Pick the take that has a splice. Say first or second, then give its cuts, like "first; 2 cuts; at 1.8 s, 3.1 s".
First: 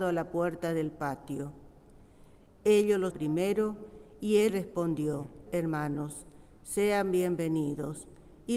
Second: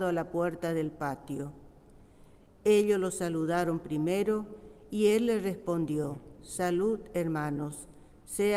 first; 3 cuts; at 3.1 s, 4.5 s, 5.5 s